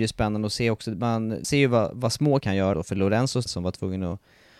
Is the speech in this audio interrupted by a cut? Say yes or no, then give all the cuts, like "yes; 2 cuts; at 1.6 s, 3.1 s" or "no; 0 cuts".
yes; 4 cuts; at 1.4 s, 2.4 s, 2.7 s, 3.5 s